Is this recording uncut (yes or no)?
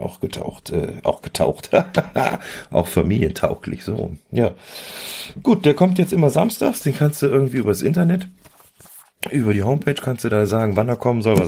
yes